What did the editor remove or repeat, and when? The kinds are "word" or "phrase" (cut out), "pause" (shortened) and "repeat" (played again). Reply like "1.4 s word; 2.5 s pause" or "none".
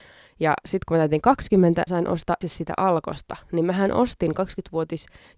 1.9 s phrase; 2.4 s word